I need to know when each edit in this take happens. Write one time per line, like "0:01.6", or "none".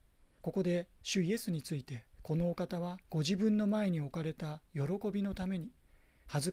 0:02.1
0:03.0